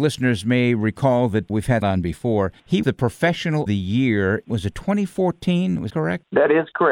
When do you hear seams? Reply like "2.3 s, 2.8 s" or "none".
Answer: 1.5 s, 1.8 s, 2.8 s, 3.7 s, 4.4 s, 5.9 s